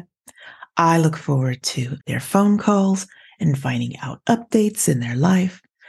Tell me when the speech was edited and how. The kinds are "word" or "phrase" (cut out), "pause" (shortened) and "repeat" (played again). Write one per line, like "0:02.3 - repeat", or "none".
0:02.0 - pause

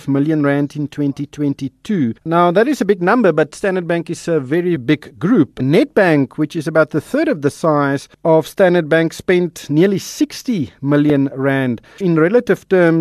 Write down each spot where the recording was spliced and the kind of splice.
0:02.2 - pause
0:04.8 - word
0:08.1 - pause
0:12.0 - word

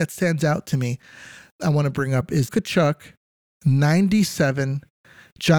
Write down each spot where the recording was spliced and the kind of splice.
0:02.5 - word

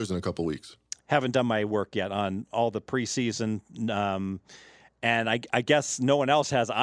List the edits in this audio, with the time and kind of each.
none

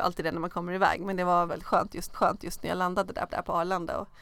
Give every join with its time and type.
0:01.5 - word
0:02.1 - repeat
0:03.3 - repeat

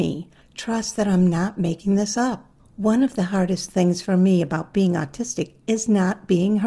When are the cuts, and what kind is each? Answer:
none

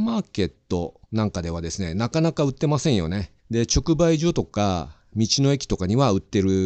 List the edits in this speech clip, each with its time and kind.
0:01.0 - pause
0:03.4 - pause

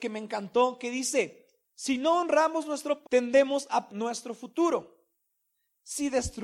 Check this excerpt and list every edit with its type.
0:03.0 - word
0:03.9 - word

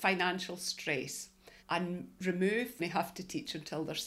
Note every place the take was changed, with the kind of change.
0:01.6 - pause
0:02.8 - phrase

